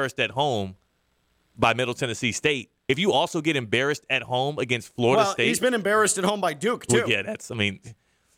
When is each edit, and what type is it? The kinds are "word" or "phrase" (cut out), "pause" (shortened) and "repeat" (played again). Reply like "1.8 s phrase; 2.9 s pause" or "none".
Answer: 2.8 s pause